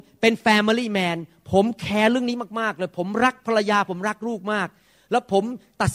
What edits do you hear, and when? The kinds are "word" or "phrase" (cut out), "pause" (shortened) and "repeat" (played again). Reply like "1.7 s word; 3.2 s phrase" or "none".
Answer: none